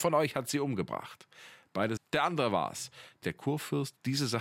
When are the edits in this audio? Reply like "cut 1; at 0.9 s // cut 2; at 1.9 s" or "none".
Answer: cut 1; at 2.0 s // cut 2; at 3.2 s